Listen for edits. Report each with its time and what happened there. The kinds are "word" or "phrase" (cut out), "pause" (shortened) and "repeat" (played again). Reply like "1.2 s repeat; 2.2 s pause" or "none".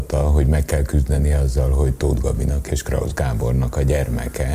none